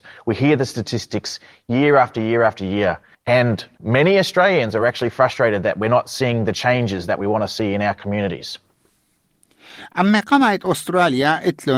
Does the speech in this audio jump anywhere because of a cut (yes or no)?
no